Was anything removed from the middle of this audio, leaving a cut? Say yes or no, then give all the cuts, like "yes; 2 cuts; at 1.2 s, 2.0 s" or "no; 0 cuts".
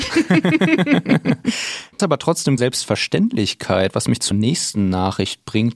yes; 3 cuts; at 2.0 s, 2.6 s, 4.3 s